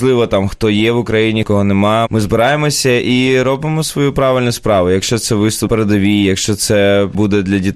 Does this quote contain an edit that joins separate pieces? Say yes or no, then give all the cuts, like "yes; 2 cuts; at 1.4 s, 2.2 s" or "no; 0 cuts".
yes; 1 cut; at 5.7 s